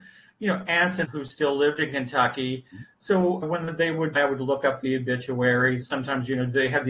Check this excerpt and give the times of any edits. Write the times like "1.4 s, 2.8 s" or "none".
1.0 s, 3.4 s, 4.1 s, 5.8 s